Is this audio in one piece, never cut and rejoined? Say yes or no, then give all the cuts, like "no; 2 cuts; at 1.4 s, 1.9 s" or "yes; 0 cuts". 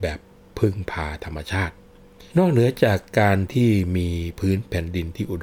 no; 1 cut; at 2.3 s